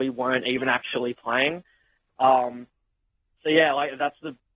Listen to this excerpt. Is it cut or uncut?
uncut